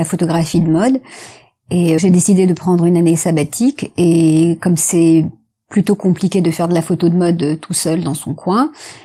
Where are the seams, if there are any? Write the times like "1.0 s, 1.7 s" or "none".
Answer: 2.0 s